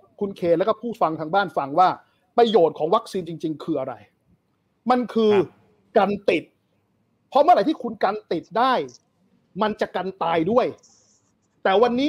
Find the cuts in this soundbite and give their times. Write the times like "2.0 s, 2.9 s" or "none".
none